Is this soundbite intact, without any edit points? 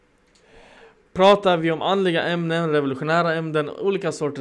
yes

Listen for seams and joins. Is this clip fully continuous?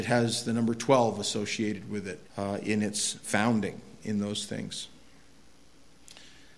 no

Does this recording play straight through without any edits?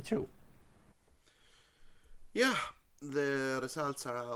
yes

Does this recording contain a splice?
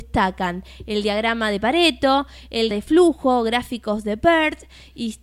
yes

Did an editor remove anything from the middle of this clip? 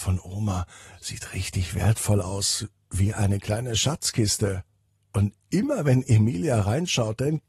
no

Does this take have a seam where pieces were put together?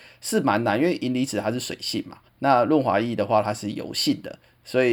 yes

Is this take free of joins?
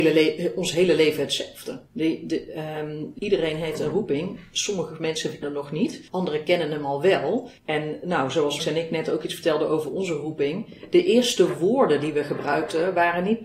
no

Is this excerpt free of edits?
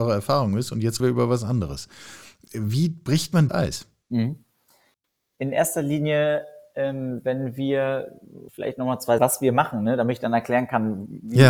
no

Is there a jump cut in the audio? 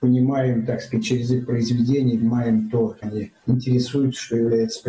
yes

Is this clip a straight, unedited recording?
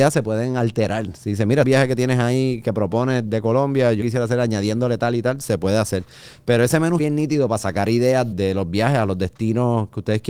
no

